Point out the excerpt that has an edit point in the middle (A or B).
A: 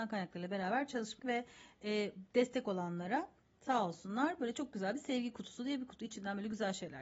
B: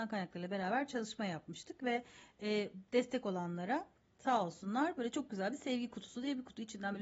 A